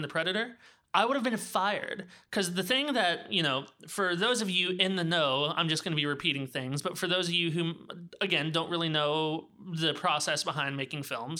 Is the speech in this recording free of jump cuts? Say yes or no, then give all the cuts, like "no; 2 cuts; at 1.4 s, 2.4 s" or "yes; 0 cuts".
yes; 0 cuts